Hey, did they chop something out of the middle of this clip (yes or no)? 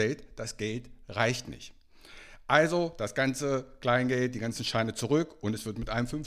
no